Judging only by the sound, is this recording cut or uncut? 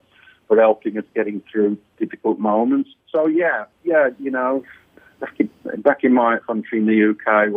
cut